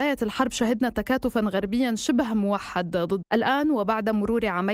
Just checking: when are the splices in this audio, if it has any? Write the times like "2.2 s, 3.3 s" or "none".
3.2 s